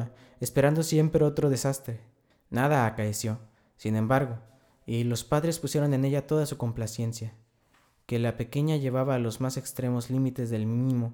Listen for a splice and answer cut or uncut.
uncut